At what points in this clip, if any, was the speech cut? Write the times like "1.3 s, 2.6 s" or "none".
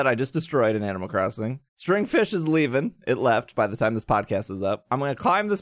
1.7 s